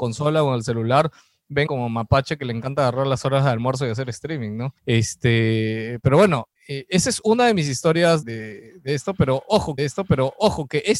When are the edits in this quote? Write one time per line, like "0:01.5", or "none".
0:01.7
0:04.8
0:06.6
0:08.2
0:09.8